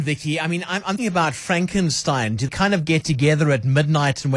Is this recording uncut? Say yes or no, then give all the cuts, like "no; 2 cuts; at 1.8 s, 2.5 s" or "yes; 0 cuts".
no; 2 cuts; at 1.0 s, 2.5 s